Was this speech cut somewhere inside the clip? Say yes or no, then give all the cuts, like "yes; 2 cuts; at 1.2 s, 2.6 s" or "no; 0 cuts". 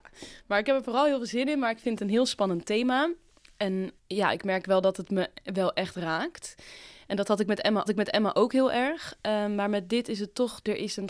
yes; 2 cuts; at 4.0 s, 7.9 s